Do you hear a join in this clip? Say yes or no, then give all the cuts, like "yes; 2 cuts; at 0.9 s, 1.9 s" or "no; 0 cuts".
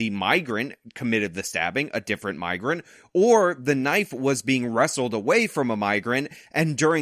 no; 0 cuts